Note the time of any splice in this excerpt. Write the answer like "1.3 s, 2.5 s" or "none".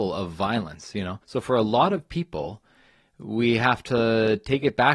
1.2 s